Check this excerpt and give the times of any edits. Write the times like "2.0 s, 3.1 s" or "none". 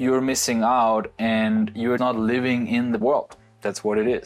2.0 s, 3.0 s